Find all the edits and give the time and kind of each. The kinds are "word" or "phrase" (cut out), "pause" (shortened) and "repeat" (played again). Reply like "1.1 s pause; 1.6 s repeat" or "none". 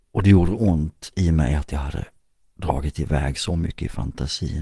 none